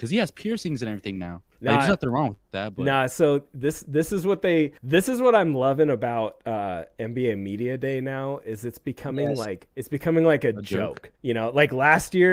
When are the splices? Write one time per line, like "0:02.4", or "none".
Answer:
0:01.5
0:04.8
0:09.7
0:11.2